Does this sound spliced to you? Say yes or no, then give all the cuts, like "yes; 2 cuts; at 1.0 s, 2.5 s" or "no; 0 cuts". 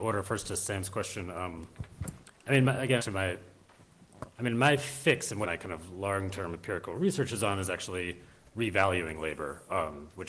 yes; 2 cuts; at 3.0 s, 5.4 s